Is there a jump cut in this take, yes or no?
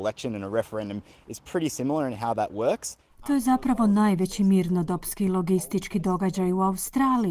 no